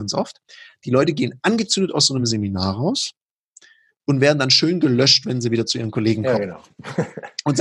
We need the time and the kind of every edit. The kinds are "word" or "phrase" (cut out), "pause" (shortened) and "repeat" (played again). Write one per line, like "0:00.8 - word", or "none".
none